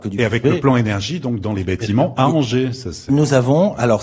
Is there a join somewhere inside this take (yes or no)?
no